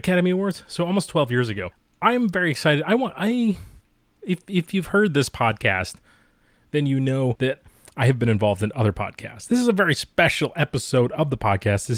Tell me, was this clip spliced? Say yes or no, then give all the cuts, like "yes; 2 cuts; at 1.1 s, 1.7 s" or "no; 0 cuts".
no; 0 cuts